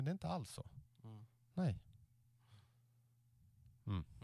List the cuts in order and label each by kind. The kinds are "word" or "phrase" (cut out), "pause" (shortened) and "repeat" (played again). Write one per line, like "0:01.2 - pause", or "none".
none